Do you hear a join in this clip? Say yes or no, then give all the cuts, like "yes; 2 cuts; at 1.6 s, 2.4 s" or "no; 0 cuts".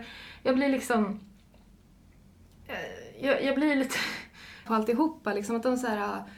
yes; 1 cut; at 4.7 s